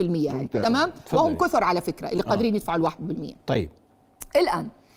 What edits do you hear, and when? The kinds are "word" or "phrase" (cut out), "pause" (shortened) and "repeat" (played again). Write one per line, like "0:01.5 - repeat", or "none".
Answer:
none